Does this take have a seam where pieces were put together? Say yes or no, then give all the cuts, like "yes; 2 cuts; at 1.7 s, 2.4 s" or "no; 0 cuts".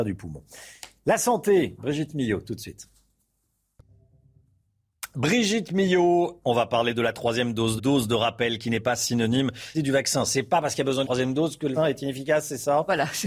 yes; 4 cuts; at 7.8 s, 9.7 s, 11.0 s, 11.8 s